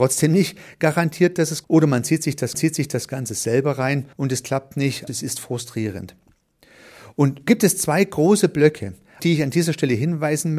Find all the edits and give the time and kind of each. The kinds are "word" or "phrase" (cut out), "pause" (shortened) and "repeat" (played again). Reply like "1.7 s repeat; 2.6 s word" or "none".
1.6 s word; 2.5 s repeat; 4.1 s pause; 5.1 s word; 7.5 s word; 9.2 s word